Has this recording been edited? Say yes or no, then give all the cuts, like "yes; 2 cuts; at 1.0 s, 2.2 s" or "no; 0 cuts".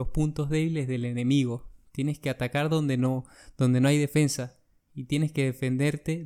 no; 0 cuts